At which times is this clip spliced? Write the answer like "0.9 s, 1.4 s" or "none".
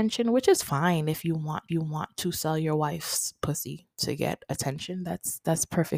1.7 s, 3.9 s

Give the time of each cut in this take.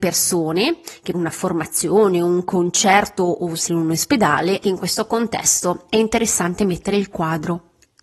1.1 s, 3.7 s, 4.6 s

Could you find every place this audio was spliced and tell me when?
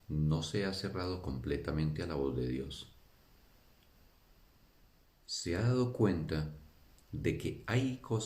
none

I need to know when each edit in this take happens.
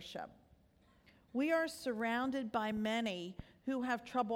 none

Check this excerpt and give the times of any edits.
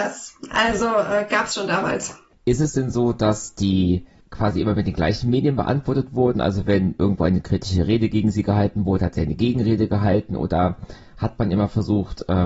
none

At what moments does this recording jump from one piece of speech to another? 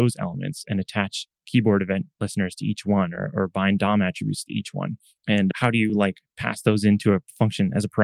none

